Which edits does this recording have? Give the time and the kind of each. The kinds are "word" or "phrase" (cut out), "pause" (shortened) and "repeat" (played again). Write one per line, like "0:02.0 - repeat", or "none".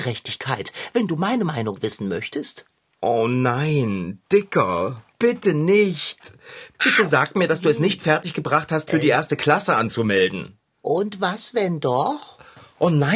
0:08.9 - word